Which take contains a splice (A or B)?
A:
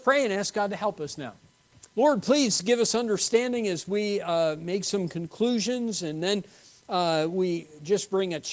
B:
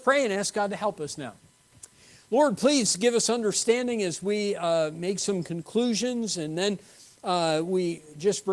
A